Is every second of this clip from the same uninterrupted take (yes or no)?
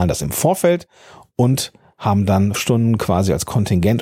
no